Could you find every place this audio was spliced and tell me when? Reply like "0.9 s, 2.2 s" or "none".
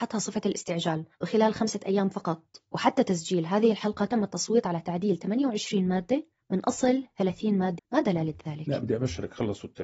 1.1 s, 7.8 s